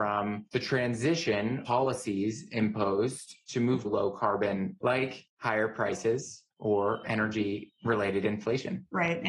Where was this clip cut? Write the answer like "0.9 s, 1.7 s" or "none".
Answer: 1.7 s, 3.8 s, 4.8 s, 7.0 s

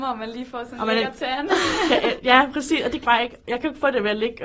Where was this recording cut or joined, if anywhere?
3.0 s

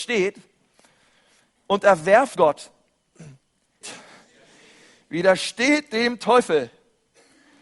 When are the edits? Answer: 2.4 s, 3.8 s

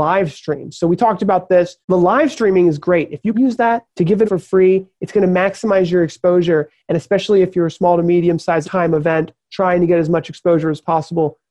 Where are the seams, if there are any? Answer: 1.8 s, 3.3 s, 3.9 s, 4.2 s, 8.6 s

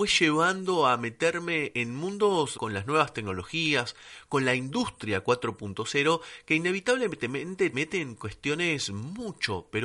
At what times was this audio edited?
2.5 s, 7.7 s

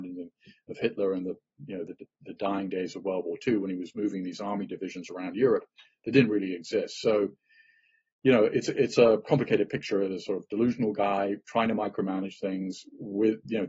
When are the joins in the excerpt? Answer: none

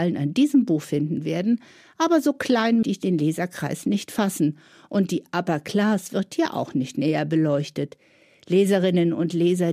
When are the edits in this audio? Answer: 2.8 s

